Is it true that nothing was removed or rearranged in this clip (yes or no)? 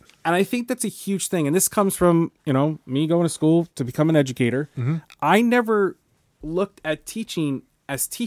yes